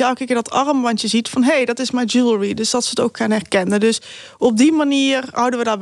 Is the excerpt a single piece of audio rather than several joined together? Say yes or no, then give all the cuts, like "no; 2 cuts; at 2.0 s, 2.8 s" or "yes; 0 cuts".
yes; 0 cuts